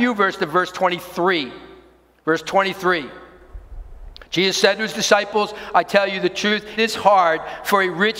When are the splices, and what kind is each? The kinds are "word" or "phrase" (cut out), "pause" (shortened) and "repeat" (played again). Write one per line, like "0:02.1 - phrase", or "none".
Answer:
0:06.8 - word